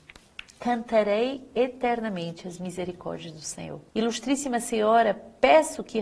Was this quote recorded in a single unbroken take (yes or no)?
no